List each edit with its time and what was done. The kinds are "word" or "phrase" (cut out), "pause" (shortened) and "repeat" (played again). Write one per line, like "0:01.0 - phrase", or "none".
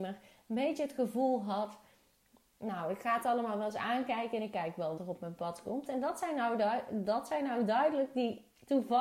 0:05.0 - word